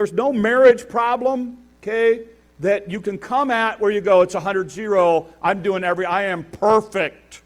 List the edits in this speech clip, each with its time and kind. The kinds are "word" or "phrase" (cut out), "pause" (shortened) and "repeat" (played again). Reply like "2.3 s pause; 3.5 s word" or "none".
none

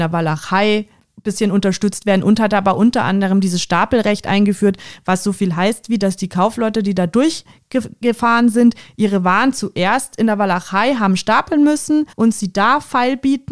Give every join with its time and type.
1.0 s pause; 12.1 s pause

